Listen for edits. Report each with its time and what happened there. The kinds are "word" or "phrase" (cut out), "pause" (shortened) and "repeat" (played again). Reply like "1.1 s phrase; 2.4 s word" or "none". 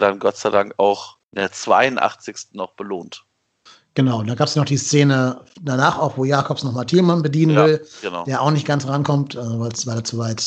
1.2 s pause; 3.7 s pause